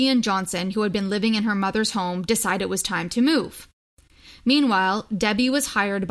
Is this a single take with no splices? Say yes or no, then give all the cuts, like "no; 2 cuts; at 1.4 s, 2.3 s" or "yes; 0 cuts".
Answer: yes; 0 cuts